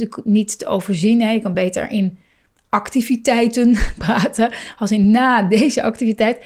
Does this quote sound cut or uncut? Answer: uncut